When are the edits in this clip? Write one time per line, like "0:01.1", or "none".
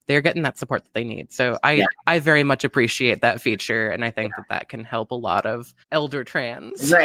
0:02.0
0:05.8